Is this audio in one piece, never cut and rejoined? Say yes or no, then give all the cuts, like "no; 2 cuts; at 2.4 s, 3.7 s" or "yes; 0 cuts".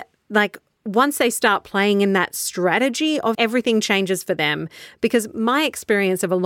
no; 1 cut; at 3.3 s